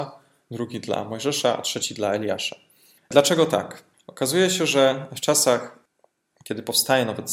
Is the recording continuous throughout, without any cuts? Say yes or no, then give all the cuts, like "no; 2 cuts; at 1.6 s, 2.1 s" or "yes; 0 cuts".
yes; 0 cuts